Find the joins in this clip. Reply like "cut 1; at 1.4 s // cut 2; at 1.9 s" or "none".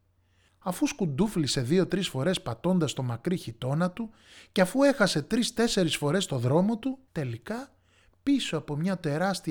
cut 1; at 7.1 s